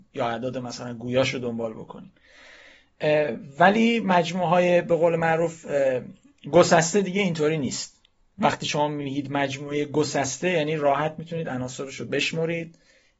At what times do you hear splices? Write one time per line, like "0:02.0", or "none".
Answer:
none